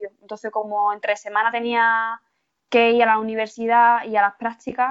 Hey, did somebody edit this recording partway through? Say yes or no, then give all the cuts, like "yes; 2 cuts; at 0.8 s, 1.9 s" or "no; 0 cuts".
no; 0 cuts